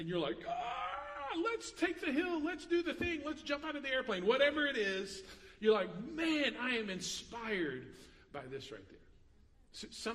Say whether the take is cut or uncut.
uncut